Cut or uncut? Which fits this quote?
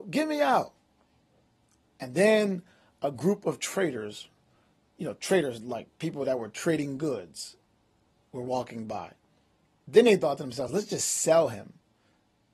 uncut